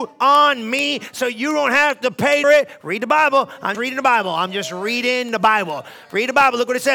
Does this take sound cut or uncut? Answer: cut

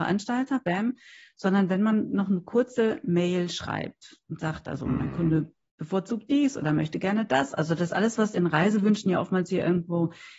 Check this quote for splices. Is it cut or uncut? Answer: uncut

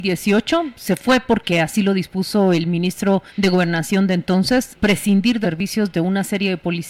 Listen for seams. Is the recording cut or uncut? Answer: cut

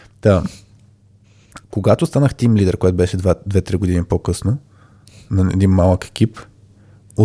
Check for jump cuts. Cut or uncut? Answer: cut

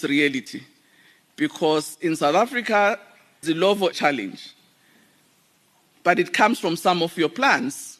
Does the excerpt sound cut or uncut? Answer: cut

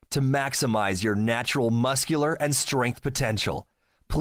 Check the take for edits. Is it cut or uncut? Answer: uncut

